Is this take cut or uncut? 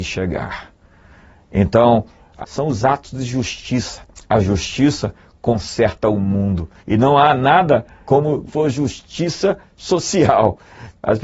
cut